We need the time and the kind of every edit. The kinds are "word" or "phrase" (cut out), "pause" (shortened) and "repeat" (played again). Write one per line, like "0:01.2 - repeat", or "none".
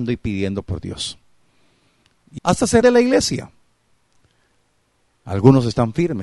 0:02.4 - word
0:02.8 - word